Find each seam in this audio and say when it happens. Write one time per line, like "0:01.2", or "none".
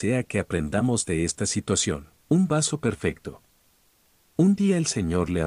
0:02.2

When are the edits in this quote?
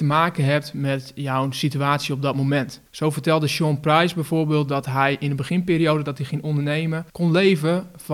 0:02.9
0:07.1

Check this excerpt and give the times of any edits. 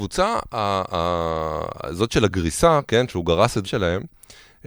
0:03.6

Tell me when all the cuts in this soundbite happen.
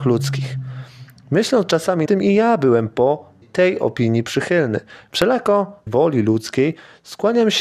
0:02.1
0:03.4
0:05.9

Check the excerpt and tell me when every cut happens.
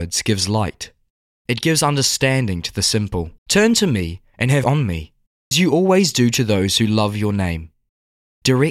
0:03.4
0:04.6
0:05.5

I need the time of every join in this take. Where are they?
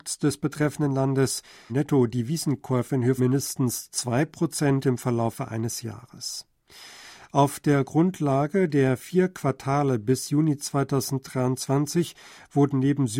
0:01.7
0:03.2

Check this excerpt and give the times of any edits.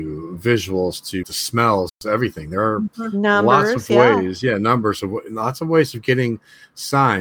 0:01.2

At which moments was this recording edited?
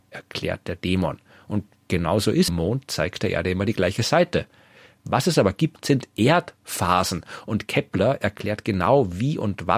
0:02.5

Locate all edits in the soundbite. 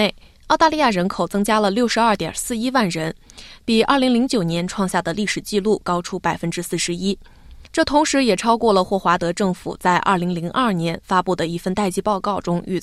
0:07.7

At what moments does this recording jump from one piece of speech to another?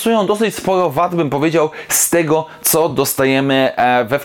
none

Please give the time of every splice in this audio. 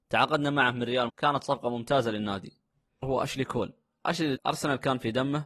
0:01.1
0:03.0
0:04.4

